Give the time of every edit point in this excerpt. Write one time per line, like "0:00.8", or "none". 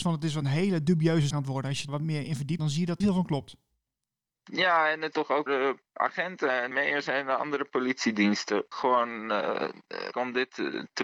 0:01.3
0:01.9
0:02.6
0:03.0
0:05.1
0:05.5
0:06.7
0:08.7
0:10.1